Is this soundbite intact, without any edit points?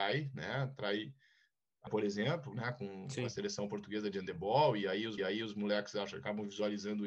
no; 2 cuts; at 1.9 s, 5.2 s

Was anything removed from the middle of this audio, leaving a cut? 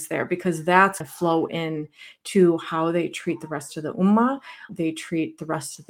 yes; 2 cuts; at 1.0 s, 4.7 s

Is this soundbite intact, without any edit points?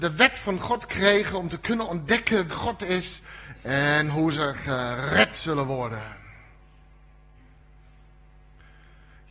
no; 1 cut; at 2.5 s

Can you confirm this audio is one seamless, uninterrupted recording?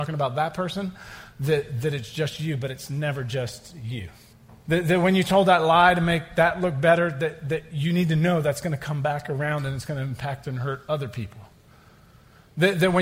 no; 1 cut; at 4.3 s

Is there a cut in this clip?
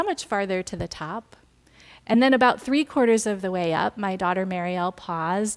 no; 0 cuts

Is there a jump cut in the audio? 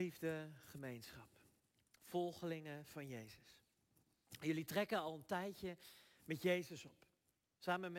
no; 0 cuts

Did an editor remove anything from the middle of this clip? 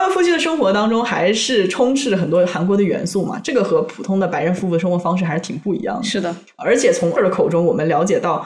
yes; 1 cut; at 7.2 s

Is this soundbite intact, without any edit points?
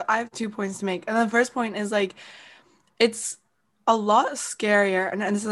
yes; 0 cuts

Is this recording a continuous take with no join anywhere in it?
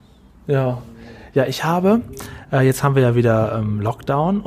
yes; 0 cuts

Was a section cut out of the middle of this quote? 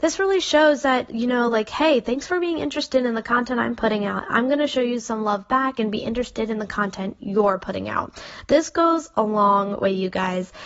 no; 0 cuts

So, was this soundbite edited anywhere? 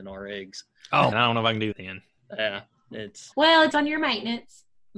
yes; 4 cuts; at 1.1 s, 1.7 s, 3.3 s, 3.7 s

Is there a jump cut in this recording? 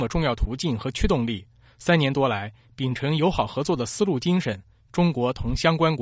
no; 0 cuts

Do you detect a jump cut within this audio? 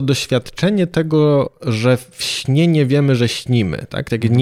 no; 0 cuts

